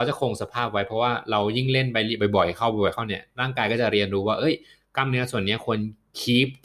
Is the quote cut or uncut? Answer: uncut